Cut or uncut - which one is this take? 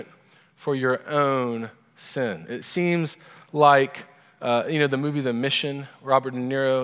uncut